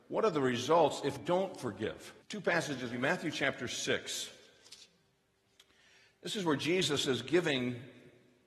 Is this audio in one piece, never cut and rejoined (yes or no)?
no